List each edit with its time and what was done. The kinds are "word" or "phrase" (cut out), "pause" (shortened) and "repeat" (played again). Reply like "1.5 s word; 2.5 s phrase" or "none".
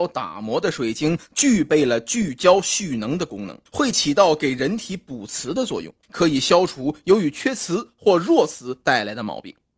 3.7 s pause; 6.0 s pause